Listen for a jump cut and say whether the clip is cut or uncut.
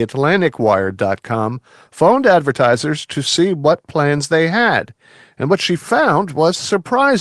uncut